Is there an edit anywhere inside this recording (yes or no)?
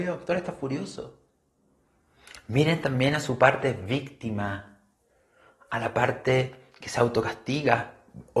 no